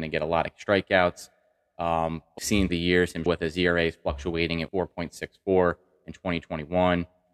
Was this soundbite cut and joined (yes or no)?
yes